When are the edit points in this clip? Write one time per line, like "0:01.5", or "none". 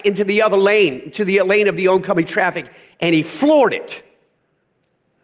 none